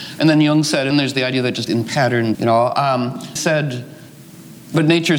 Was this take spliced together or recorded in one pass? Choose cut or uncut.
cut